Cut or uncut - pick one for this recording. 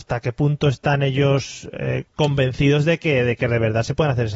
cut